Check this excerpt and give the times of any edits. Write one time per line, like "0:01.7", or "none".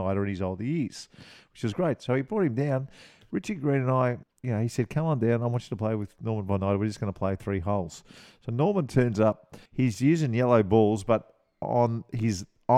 0:04.2
0:09.6